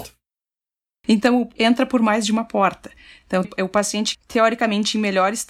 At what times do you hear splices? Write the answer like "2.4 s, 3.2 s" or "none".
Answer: 1.6 s, 3.4 s, 4.1 s